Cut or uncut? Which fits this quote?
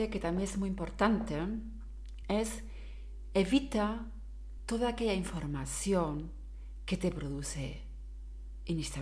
uncut